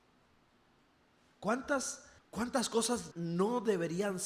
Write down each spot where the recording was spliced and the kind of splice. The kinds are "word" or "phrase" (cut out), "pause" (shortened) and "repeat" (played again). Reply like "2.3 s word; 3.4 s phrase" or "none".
2.2 s pause; 3.1 s word